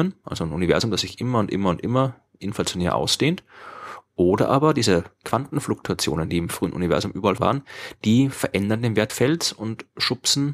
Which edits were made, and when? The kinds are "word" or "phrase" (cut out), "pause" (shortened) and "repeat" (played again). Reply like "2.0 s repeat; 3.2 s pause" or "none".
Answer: 7.4 s word; 9.1 s word